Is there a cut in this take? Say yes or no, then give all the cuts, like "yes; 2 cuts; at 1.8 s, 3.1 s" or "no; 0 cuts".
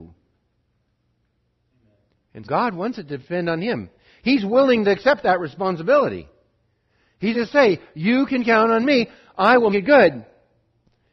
yes; 3 cuts; at 2.4 s, 7.3 s, 9.7 s